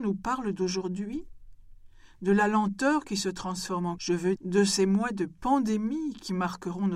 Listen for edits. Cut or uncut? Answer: cut